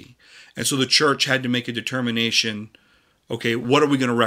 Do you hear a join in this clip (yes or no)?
no